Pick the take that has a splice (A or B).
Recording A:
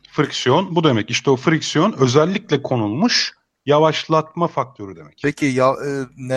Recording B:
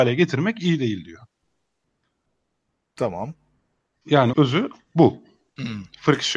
B